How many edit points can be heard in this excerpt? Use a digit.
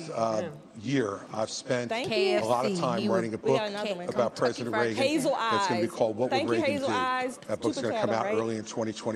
0